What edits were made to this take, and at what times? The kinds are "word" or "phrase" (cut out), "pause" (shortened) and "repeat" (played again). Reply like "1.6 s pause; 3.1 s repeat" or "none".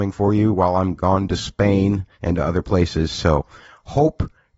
2.1 s pause